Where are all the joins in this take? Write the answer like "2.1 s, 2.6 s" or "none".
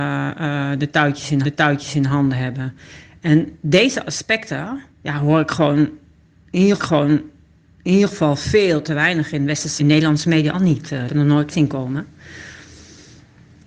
1.4 s, 4.9 s, 6.8 s, 9.8 s, 10.5 s, 11.1 s, 11.5 s